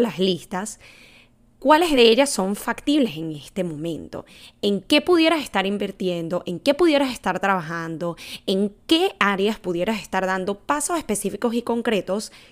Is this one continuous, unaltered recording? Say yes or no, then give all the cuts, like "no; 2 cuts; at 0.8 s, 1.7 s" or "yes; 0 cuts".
yes; 0 cuts